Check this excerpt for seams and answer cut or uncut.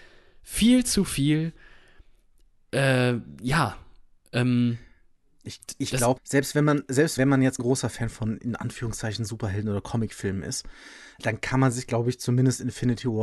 cut